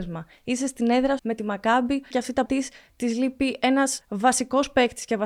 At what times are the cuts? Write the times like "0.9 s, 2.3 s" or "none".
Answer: 1.2 s, 2.1 s, 2.5 s, 4.0 s